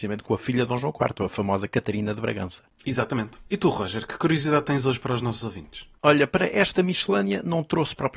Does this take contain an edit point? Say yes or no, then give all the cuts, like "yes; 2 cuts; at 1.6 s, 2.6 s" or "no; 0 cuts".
no; 0 cuts